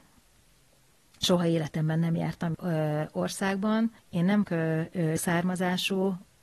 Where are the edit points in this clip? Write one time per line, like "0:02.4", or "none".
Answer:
0:02.5
0:04.0
0:04.4
0:05.2